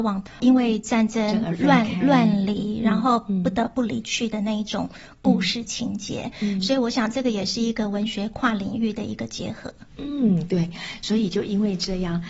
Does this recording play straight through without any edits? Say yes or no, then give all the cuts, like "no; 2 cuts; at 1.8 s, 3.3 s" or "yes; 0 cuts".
yes; 0 cuts